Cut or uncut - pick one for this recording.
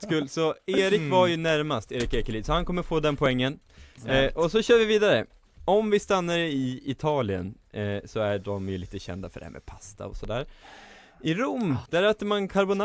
cut